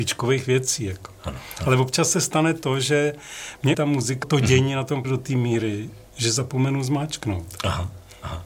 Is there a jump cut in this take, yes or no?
yes